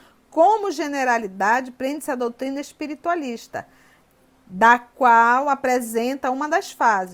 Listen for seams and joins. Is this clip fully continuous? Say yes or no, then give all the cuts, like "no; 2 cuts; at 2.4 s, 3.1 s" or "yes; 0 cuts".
yes; 0 cuts